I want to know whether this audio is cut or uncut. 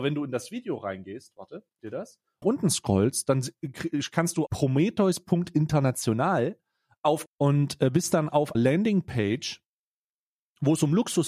cut